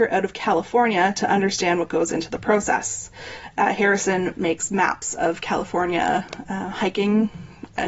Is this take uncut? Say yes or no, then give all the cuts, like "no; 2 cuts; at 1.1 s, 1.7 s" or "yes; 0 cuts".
yes; 0 cuts